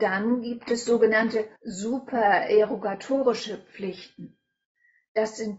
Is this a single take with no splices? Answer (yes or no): no